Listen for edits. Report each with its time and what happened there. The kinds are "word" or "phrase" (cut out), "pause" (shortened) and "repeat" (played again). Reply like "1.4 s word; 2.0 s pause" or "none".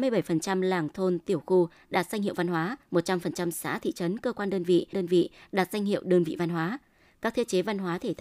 2.8 s pause; 4.9 s repeat

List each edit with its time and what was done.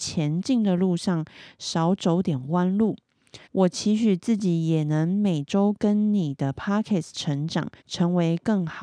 3.4 s pause; 7.8 s pause

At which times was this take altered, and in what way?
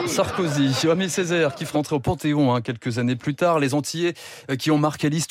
1.7 s word

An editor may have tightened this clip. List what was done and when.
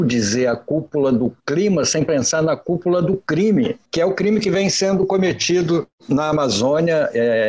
1.4 s pause; 3.9 s pause

